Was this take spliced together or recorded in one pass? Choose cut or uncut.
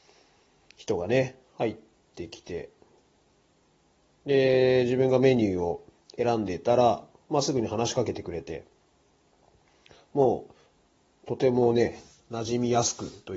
uncut